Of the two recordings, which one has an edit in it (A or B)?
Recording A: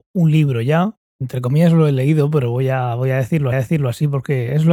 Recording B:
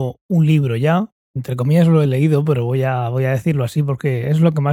A